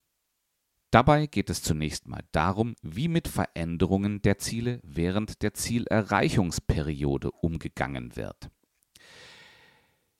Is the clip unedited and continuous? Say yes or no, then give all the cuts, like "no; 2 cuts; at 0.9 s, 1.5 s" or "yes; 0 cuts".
yes; 0 cuts